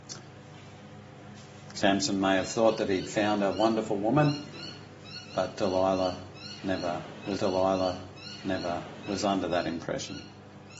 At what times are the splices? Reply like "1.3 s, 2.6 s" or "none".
5.3 s, 7.4 s